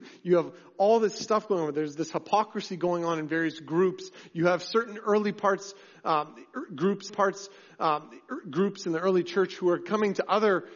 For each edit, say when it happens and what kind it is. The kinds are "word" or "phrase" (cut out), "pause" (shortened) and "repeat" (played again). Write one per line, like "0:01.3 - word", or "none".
0:07.1 - repeat